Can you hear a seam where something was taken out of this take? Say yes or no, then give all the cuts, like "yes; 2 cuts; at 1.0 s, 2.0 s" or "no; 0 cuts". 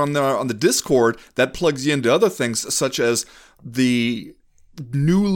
no; 0 cuts